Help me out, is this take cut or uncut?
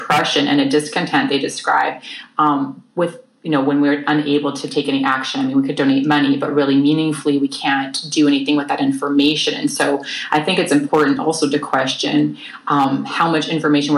uncut